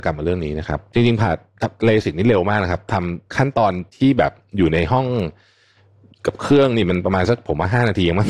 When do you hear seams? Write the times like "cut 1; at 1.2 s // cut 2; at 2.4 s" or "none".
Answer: cut 1; at 3.3 s